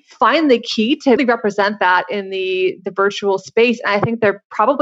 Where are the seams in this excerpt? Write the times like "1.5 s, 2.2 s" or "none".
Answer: 1.2 s